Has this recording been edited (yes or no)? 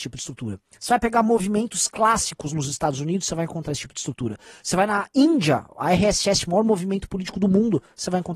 no